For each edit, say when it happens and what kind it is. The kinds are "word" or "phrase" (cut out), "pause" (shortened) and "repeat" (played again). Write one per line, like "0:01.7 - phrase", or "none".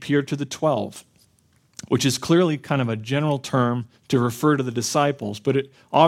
0:04.0 - pause